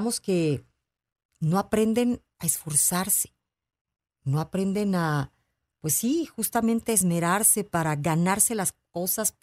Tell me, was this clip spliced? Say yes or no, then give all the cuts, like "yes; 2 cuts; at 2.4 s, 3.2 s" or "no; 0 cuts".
no; 0 cuts